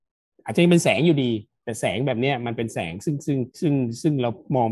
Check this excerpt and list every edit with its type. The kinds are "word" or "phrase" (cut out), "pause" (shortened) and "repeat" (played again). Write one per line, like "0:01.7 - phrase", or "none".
0:03.5 - pause